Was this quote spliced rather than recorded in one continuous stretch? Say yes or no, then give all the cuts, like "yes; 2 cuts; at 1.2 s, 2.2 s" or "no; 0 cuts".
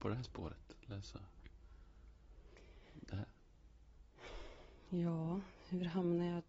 yes; 1 cut; at 2.8 s